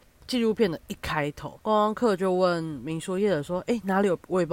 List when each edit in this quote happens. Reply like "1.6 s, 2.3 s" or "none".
1.6 s